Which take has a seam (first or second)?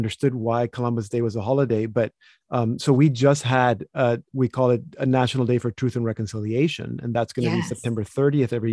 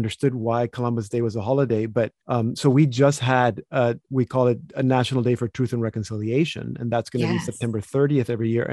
second